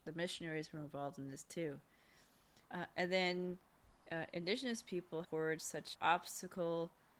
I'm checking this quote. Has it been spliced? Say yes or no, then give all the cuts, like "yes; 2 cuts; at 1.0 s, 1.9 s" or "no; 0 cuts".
yes; 3 cuts; at 2.6 s, 5.2 s, 5.9 s